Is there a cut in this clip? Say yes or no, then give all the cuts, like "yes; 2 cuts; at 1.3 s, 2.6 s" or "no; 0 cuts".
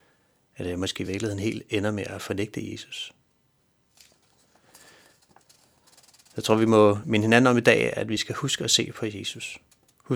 no; 0 cuts